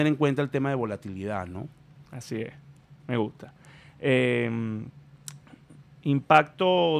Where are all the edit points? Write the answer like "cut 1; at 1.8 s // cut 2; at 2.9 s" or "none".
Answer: cut 1; at 2.1 s // cut 2; at 3.0 s // cut 3; at 5.9 s